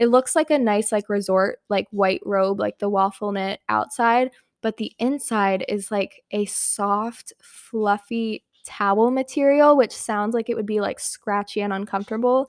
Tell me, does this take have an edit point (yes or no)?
no